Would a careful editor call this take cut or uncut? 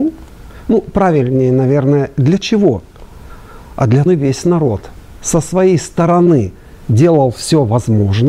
cut